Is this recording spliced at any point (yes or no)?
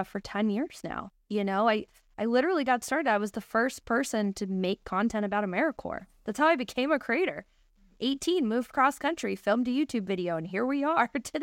no